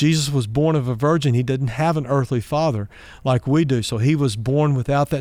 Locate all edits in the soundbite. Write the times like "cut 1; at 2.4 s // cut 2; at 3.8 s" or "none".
none